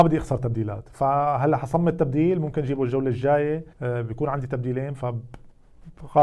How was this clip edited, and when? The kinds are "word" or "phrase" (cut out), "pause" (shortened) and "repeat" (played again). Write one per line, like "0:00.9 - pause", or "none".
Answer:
0:03.7 - pause